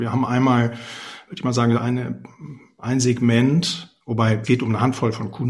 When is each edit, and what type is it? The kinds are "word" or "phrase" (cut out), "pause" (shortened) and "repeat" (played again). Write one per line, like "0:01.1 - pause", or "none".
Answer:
0:01.8 - word
0:04.4 - word